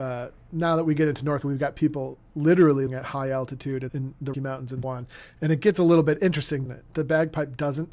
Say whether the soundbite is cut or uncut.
cut